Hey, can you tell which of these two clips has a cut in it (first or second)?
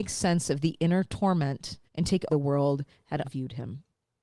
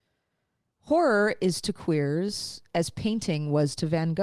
first